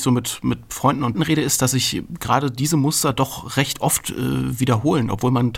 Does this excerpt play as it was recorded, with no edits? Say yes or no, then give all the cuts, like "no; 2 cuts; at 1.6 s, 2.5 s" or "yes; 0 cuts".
no; 1 cut; at 1.1 s